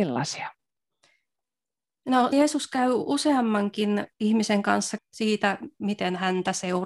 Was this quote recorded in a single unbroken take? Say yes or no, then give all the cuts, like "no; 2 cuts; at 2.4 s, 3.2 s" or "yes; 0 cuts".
no; 3 cuts; at 2.3 s, 4.1 s, 5.0 s